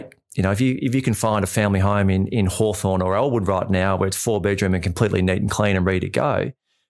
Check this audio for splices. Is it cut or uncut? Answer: uncut